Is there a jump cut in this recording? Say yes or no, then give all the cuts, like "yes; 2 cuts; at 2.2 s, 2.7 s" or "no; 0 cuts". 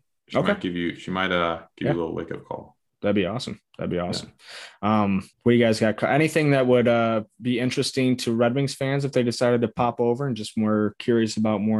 yes; 1 cut; at 5.3 s